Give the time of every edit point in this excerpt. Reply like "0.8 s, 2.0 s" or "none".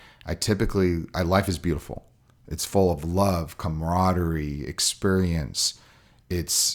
none

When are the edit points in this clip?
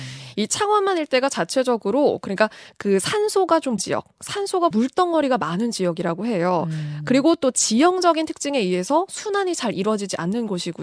3.8 s, 4.7 s

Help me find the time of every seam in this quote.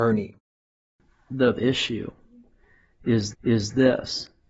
1.6 s, 3.3 s

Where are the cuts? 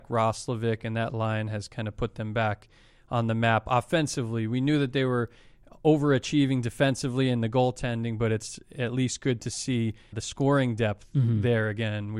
10.1 s

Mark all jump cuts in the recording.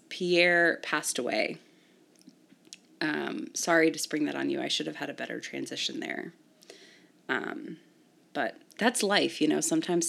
none

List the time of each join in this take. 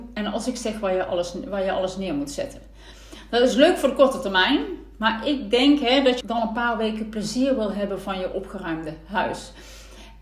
6.2 s

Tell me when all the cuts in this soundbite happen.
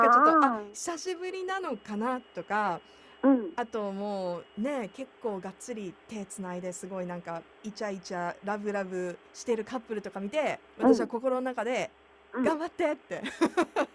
4.5 s, 7.5 s, 9.3 s, 10.7 s

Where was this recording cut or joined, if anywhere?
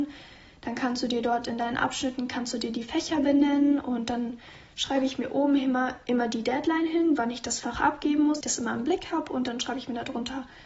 8.4 s

